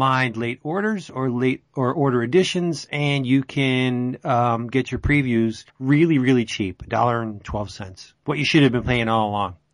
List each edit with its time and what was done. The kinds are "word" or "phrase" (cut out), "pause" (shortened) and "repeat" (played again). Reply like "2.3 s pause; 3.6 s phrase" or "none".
5.7 s pause; 8.2 s pause